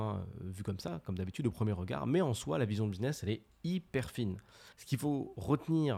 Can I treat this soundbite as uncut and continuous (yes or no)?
no